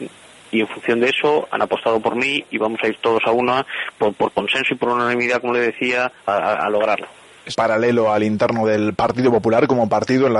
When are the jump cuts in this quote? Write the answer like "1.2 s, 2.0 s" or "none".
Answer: 6.2 s, 7.5 s

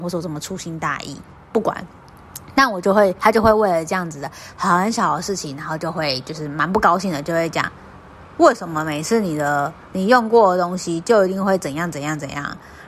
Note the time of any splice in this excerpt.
none

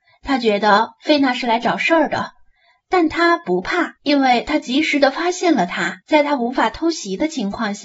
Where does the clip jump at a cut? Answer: 4.0 s, 6.0 s

